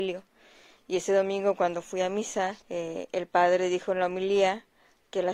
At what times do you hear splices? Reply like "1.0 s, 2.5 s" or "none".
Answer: 2.6 s